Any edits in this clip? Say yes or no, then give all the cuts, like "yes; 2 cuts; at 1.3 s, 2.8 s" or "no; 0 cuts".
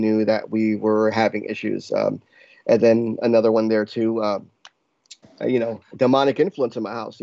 no; 0 cuts